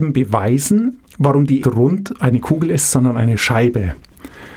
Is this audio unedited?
no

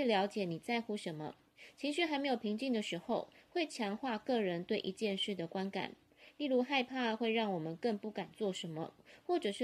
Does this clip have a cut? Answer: no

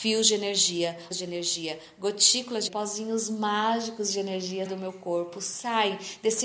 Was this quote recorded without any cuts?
no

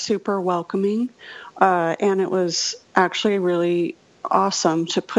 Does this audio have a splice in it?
no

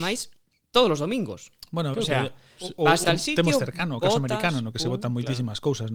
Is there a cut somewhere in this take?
yes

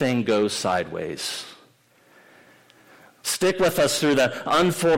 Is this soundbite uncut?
yes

